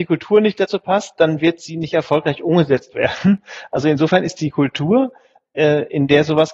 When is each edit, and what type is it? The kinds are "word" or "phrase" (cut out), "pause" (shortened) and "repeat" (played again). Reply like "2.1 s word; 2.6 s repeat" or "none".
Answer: none